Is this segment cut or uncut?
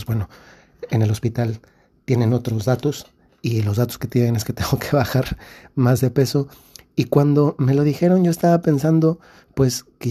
uncut